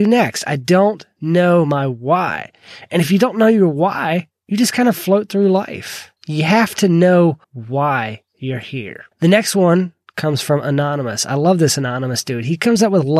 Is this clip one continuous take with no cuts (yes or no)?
no